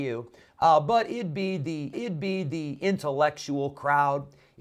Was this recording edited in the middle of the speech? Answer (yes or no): yes